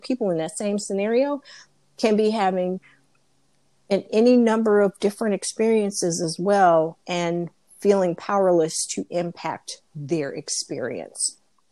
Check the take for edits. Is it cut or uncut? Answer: uncut